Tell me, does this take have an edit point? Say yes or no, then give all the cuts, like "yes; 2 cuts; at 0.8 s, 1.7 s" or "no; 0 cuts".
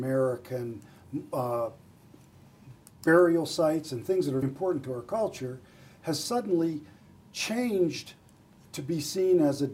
yes; 1 cut; at 4.4 s